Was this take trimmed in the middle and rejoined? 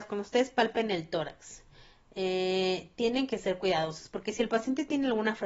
no; 0 cuts

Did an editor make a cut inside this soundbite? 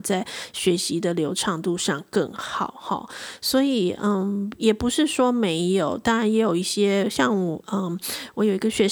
no; 0 cuts

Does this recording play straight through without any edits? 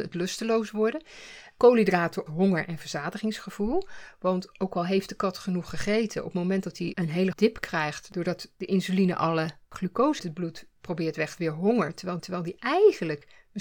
no; 6 cuts; at 2.3 s, 6.9 s, 7.3 s, 10.2 s, 11.4 s, 12.2 s

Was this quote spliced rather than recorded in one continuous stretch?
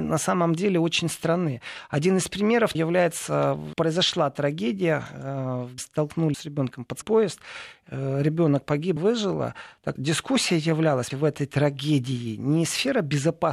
yes; 8 cuts; at 2.7 s, 3.7 s, 5.8 s, 6.3 s, 7.0 s, 9.0 s, 10.0 s, 11.1 s

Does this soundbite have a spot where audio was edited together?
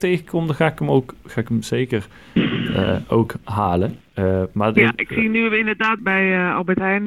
yes; 2 cuts; at 4.0 s, 6.0 s

